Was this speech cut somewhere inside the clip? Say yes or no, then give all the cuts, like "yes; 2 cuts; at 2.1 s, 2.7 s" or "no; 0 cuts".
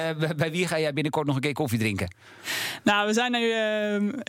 no; 0 cuts